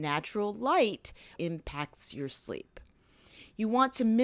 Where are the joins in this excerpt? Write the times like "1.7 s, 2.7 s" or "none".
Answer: 1.4 s